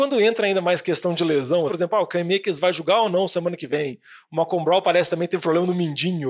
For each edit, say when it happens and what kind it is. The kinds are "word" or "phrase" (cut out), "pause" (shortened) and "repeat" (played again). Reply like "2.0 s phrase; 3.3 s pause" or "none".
1.7 s word